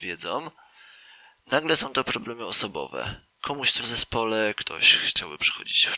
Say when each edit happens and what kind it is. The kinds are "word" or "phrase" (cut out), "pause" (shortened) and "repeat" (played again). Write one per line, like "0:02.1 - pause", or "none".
0:03.3 - pause
0:03.8 - phrase

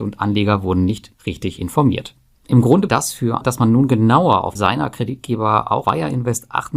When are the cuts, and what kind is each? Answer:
0:01.1 - pause
0:02.3 - pause
0:02.9 - word
0:03.4 - word
0:04.6 - phrase
0:05.8 - word

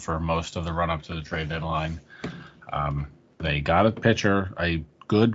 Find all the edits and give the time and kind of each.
0:03.3 - pause

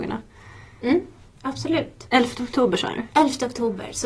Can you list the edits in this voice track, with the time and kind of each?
0:03.1 - pause

